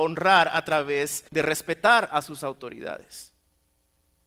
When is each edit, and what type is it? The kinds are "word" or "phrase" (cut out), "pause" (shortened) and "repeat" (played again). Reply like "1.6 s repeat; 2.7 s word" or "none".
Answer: 1.3 s pause